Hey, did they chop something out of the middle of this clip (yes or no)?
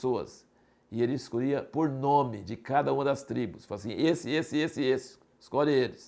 no